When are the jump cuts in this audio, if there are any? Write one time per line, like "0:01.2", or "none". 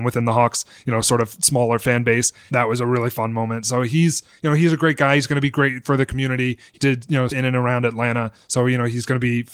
0:02.5
0:06.7
0:07.3